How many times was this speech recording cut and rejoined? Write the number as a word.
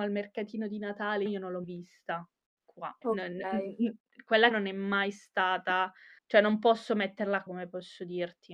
six